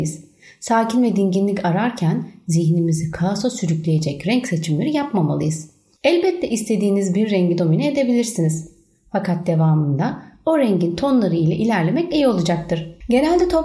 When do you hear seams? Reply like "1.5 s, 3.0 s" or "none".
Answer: none